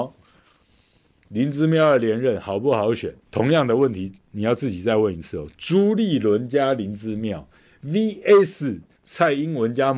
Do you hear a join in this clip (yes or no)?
yes